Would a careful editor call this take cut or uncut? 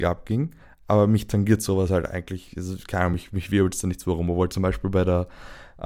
uncut